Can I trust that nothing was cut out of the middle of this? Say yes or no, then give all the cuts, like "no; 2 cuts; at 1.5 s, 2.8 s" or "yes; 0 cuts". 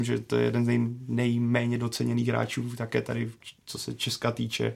no; 1 cut; at 3.6 s